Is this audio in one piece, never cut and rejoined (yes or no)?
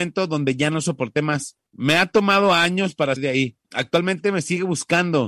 no